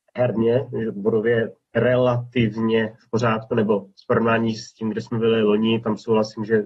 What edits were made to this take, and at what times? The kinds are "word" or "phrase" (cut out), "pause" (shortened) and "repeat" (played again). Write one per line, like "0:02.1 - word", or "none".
0:01.6 - pause